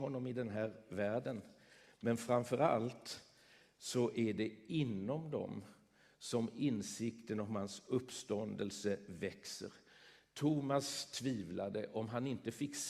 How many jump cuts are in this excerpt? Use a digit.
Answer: 0